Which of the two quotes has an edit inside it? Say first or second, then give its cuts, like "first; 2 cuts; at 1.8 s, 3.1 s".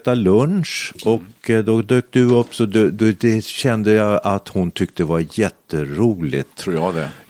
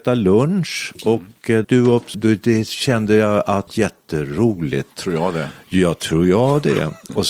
second; 3 cuts; at 1.6 s, 2.1 s, 3.7 s